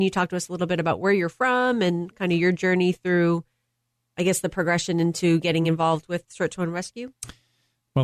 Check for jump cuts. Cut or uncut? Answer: uncut